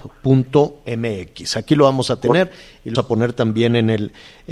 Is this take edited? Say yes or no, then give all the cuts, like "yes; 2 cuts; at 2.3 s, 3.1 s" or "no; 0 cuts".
yes; 1 cut; at 2.9 s